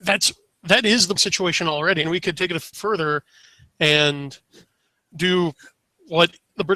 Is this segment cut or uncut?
cut